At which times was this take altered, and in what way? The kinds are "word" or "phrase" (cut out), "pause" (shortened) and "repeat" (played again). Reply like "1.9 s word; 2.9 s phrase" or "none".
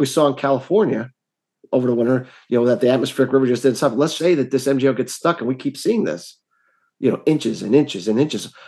4.2 s word